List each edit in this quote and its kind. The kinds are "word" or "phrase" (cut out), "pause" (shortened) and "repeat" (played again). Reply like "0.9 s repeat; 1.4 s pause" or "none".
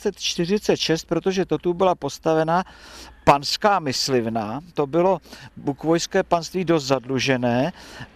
none